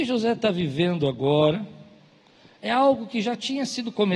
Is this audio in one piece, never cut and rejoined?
yes; 0 cuts

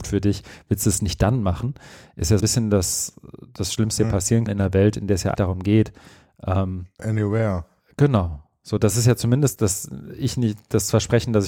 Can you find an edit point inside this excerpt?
yes; 6 cuts; at 2.4 s, 4.0 s, 4.5 s, 5.4 s, 7.0 s, 9.6 s

